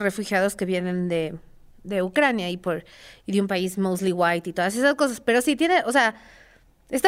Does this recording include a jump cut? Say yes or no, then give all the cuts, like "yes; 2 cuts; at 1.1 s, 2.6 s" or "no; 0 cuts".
no; 0 cuts